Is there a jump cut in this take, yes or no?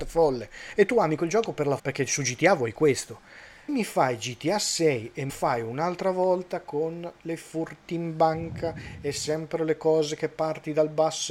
yes